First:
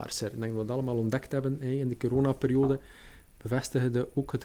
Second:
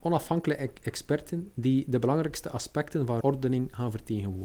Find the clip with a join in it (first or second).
second